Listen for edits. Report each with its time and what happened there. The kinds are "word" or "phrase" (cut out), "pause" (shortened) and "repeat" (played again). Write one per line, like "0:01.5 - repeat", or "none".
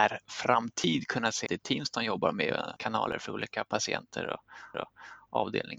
0:01.5 - word
0:02.8 - word
0:04.7 - repeat